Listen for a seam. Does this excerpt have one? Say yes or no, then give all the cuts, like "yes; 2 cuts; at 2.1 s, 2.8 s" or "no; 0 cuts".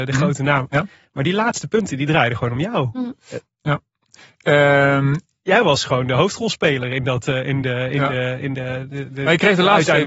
no; 0 cuts